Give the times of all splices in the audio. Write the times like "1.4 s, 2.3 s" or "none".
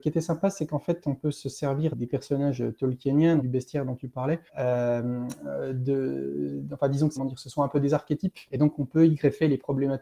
1.9 s, 3.4 s, 4.5 s, 7.2 s, 8.5 s